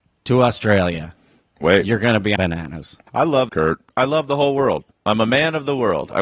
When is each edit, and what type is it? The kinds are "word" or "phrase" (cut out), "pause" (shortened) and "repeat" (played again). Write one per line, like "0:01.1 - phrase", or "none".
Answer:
0:01.6 - word
0:02.4 - word
0:03.1 - pause
0:03.5 - phrase